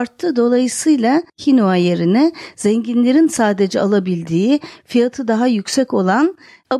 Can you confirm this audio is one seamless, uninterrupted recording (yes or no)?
no